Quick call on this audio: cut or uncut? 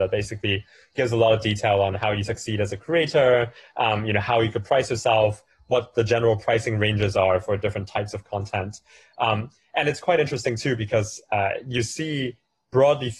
uncut